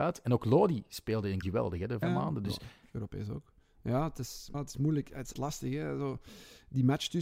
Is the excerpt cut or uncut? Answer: cut